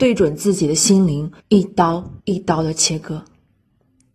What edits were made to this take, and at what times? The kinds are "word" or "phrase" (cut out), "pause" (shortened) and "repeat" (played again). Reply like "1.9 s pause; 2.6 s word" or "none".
1.4 s pause; 2.2 s pause